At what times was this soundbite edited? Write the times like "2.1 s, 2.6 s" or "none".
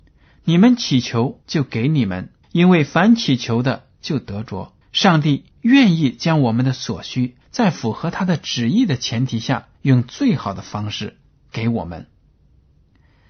1.4 s, 2.4 s, 4.8 s, 5.5 s, 7.4 s, 9.7 s